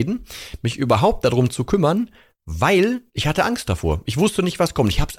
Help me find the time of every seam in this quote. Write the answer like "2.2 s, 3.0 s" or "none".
none